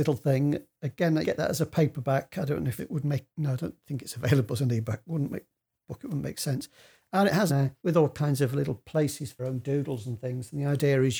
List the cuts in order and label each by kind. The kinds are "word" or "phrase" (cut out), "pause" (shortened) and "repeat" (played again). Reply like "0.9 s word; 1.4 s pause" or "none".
1.2 s word; 2.8 s word; 3.3 s pause; 7.5 s phrase; 7.8 s pause; 9.4 s phrase